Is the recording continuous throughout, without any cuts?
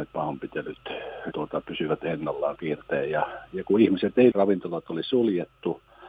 no; 3 cuts; at 1.3 s, 2.6 s, 4.3 s

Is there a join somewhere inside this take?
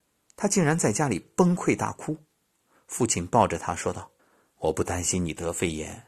yes; 1 cut; at 4.2 s

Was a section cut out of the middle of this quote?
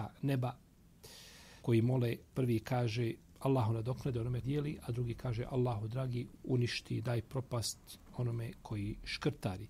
yes; 4 cuts; at 1.6 s, 2.3 s, 4.4 s, 6.3 s

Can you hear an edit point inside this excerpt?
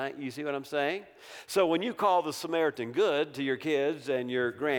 no; 0 cuts

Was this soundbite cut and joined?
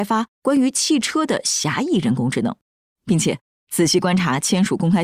no; 0 cuts

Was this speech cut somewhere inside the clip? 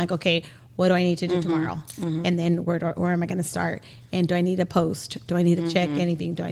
no; 0 cuts

